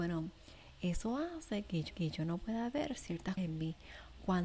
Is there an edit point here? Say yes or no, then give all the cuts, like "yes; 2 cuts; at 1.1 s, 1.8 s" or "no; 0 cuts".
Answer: yes; 2 cuts; at 1.9 s, 3.4 s